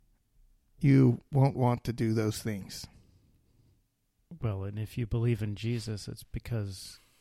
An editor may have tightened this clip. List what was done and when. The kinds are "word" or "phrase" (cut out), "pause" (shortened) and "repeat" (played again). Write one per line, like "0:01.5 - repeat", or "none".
none